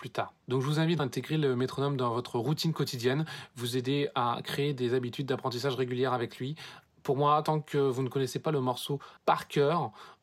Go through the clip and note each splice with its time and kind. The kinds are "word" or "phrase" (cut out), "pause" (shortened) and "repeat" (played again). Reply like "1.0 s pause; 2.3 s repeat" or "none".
1.0 s word; 9.2 s pause

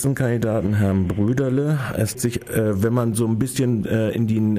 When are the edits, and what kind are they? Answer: 2.1 s word

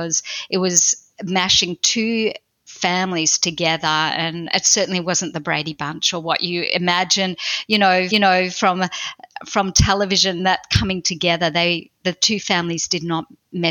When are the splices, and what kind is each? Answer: 8.1 s repeat

